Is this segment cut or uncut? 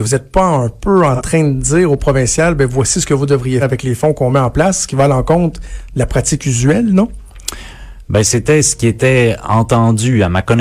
cut